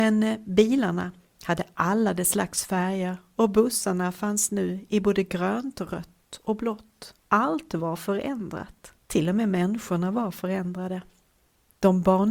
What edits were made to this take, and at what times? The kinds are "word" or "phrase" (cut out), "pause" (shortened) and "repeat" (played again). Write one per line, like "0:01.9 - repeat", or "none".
0:07.2 - pause
0:09.0 - pause